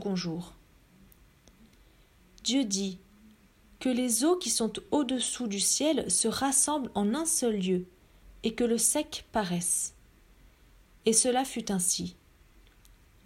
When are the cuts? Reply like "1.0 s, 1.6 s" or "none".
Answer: none